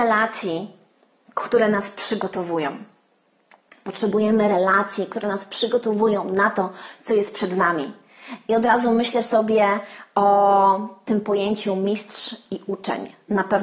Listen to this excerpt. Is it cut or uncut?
uncut